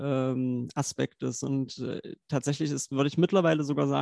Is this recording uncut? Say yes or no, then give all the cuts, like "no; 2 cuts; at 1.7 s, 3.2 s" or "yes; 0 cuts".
yes; 0 cuts